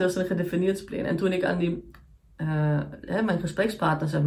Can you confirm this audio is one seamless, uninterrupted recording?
yes; 0 cuts

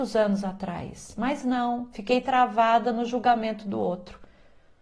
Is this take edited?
no; 0 cuts

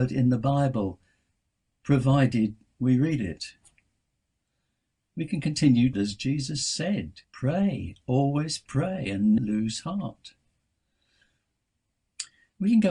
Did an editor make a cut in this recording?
yes; 3 cuts; at 5.9 s, 7.2 s, 9.4 s

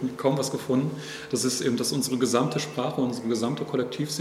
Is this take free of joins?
yes; 0 cuts

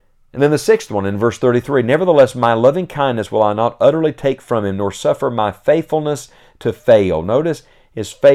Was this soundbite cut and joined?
no; 0 cuts

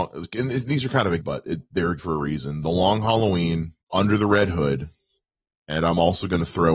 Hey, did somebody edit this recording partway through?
yes; 3 cuts; at 1.2 s, 2.0 s, 3.8 s

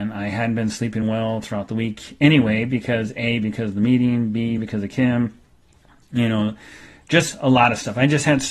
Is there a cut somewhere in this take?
no; 0 cuts

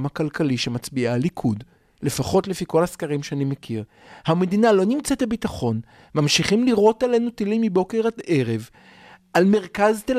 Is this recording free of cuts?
yes; 0 cuts

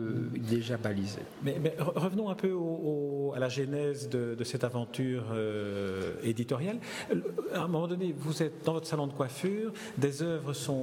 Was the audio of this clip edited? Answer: no; 0 cuts

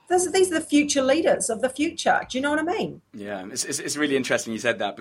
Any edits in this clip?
yes; 1 cut; at 3.1 s

